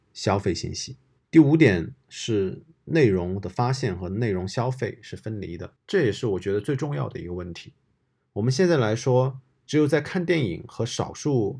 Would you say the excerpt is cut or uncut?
cut